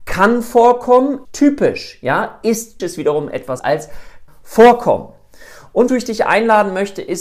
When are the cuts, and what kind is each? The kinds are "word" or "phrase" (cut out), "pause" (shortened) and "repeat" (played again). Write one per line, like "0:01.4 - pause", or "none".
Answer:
0:01.2 - word
0:02.8 - word
0:03.6 - word
0:04.3 - word
0:05.9 - word